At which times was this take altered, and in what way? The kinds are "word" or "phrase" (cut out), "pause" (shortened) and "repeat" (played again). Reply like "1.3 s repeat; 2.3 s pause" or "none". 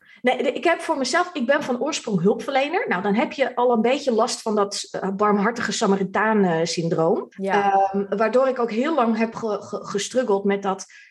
7.3 s pause